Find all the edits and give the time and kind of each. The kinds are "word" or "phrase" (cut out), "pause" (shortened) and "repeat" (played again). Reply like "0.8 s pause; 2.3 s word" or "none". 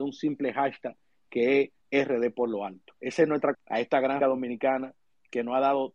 1.8 s pause; 3.0 s pause; 3.5 s word; 4.2 s word